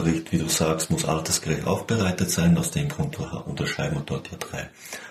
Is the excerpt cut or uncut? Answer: uncut